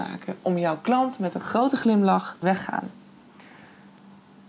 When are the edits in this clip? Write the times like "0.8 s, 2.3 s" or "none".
2.4 s